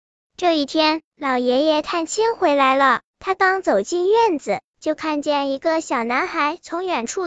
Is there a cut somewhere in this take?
yes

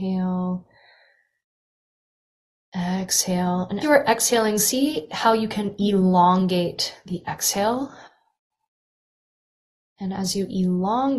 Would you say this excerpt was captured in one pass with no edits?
no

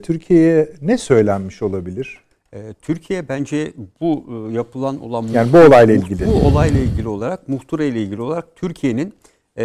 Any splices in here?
no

